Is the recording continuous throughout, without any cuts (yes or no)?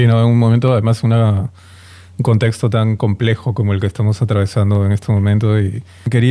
yes